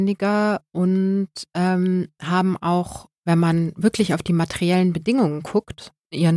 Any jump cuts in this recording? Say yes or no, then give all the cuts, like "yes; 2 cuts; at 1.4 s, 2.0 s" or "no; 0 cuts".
no; 0 cuts